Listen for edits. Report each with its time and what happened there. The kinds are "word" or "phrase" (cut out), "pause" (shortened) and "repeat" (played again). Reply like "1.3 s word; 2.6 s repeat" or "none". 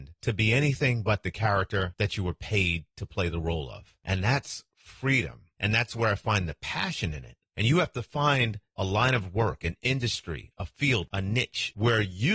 none